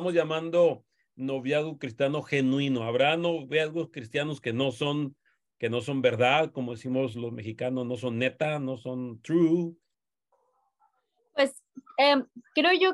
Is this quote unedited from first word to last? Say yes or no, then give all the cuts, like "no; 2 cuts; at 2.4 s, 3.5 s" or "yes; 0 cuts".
yes; 0 cuts